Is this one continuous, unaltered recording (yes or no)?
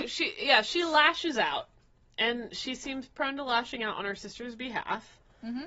yes